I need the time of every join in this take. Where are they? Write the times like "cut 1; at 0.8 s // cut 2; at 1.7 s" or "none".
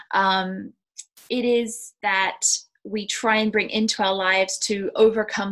cut 1; at 2.0 s